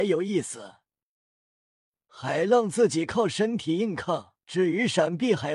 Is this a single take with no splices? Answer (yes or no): no